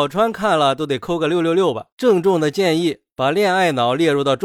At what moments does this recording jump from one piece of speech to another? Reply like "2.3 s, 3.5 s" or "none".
1.9 s